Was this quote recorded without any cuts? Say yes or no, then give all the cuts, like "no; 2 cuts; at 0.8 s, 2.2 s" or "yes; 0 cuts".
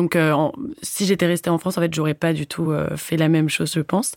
yes; 0 cuts